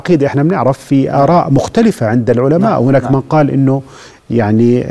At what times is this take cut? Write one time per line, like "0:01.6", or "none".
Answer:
none

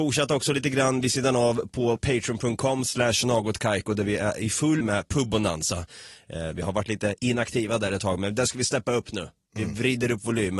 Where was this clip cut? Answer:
0:02.0
0:04.8

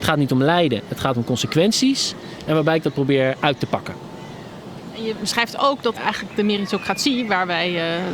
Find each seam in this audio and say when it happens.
0:06.0

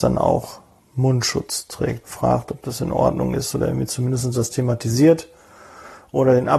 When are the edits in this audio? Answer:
0:02.0

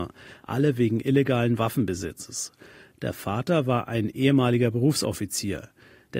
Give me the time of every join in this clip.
none

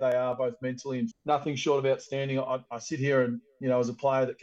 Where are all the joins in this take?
0:01.1

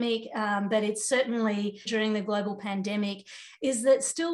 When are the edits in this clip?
0:01.9

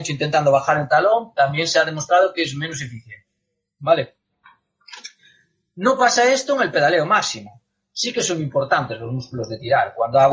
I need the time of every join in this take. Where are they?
none

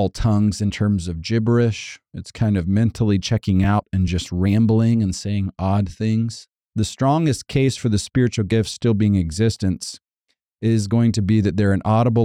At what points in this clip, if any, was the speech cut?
none

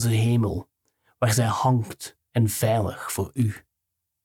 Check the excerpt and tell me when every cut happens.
0:02.3

